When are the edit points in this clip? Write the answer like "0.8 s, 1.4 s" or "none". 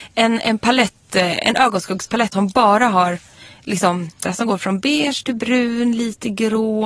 2.3 s, 4.2 s